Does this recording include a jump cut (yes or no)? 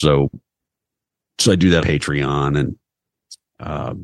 yes